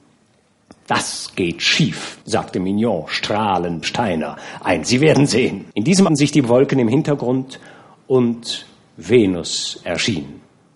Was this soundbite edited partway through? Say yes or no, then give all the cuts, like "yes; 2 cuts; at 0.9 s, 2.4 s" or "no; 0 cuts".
yes; 5 cuts; at 2.2 s, 3.8 s, 4.8 s, 5.7 s, 6.1 s